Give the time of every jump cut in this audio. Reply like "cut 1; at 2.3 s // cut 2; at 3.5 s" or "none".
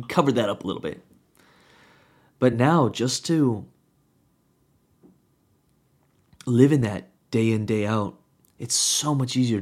none